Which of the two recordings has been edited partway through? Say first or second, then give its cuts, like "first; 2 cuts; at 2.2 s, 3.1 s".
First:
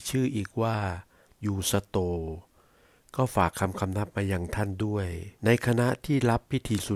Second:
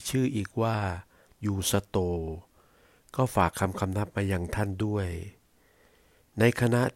first; 1 cut; at 5.3 s